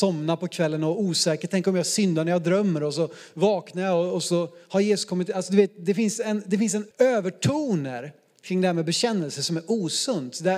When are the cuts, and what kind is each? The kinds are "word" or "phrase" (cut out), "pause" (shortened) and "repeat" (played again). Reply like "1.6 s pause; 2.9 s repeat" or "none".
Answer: 6.9 s word